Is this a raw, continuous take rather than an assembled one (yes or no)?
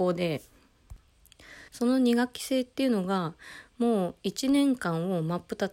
no